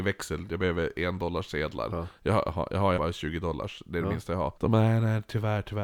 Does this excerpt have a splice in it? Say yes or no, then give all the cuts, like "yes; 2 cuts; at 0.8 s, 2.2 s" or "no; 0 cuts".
yes; 2 cuts; at 3.0 s, 4.6 s